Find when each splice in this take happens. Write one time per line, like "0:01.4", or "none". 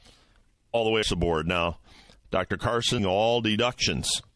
0:01.0
0:03.0